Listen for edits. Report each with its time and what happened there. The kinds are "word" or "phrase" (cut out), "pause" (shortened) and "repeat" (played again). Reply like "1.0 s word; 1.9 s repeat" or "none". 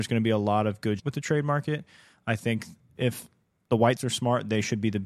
1.0 s word; 3.0 s word; 4.0 s word